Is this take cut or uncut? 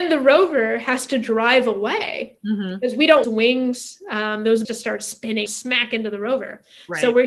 cut